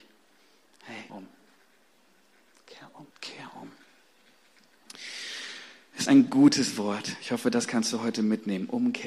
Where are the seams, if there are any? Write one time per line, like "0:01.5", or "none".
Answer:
0:01.1
0:03.1
0:06.1